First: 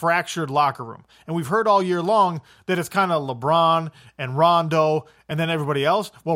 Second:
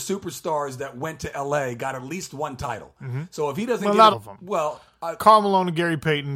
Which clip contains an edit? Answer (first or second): second